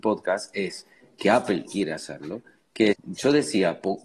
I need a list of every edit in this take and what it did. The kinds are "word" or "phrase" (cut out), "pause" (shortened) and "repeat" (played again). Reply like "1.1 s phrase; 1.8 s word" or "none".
1.7 s word; 2.9 s word